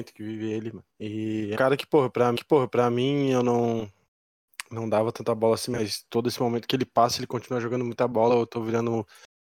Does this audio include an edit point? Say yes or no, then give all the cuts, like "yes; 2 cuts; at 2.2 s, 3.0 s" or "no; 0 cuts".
yes; 3 cuts; at 0.9 s, 1.6 s, 2.4 s